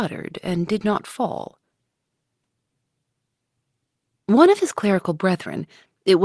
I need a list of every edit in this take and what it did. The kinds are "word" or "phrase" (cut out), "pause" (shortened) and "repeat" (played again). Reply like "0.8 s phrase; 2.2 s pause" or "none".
none